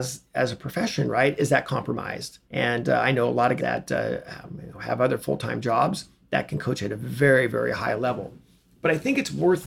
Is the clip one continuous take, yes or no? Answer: no